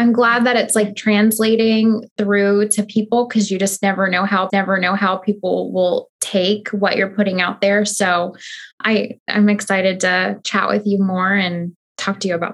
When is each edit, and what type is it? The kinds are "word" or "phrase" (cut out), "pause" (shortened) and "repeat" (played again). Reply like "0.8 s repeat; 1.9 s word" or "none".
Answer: 4.5 s repeat; 6.1 s pause